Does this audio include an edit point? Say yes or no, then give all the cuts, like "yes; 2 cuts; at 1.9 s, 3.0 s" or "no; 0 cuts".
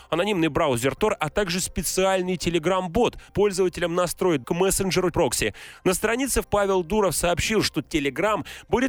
yes; 4 cuts; at 3.3 s, 4.4 s, 5.1 s, 6.4 s